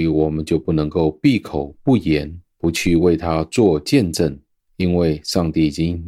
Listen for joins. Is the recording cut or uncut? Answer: uncut